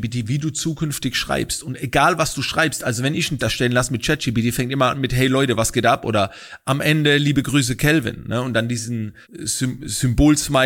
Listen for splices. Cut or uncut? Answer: cut